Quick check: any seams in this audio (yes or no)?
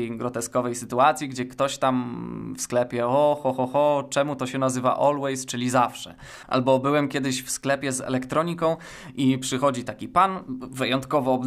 no